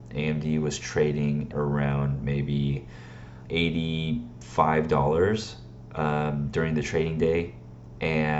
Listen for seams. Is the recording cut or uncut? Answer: cut